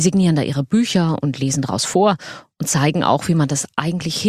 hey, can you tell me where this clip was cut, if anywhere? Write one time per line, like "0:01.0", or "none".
none